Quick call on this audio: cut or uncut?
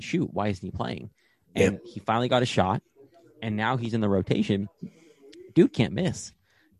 uncut